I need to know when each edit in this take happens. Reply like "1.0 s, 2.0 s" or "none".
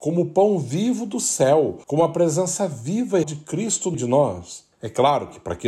1.8 s, 3.2 s, 3.9 s, 4.7 s